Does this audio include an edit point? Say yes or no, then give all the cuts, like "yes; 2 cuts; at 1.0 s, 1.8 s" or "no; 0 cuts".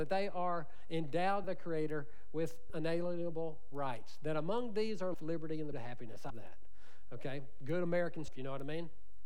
yes; 6 cuts; at 1.4 s, 2.7 s, 5.1 s, 5.7 s, 6.3 s, 8.3 s